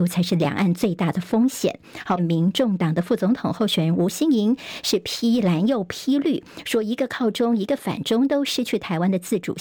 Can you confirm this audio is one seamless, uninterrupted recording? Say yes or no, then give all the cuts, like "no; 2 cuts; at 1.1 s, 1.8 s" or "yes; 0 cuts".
no; 1 cut; at 2.2 s